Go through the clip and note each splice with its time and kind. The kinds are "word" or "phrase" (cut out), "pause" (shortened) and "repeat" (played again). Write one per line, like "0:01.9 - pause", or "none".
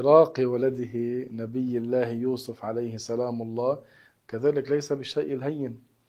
none